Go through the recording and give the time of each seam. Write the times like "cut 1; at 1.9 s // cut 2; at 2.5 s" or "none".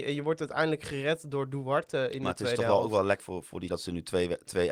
cut 1; at 3.2 s // cut 2; at 3.7 s